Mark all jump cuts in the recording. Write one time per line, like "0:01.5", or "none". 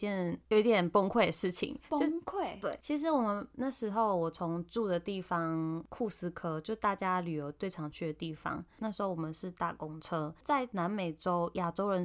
0:10.4